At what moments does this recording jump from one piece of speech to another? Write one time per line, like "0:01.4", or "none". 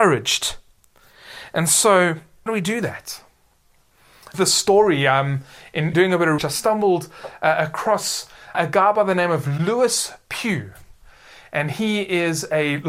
0:02.5
0:04.3
0:05.9
0:06.4
0:08.5